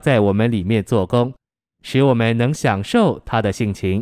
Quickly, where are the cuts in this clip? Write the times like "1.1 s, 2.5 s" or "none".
none